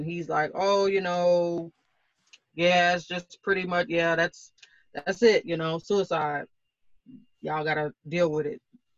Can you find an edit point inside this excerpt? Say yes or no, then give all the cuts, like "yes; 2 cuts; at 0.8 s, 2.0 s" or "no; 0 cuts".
no; 0 cuts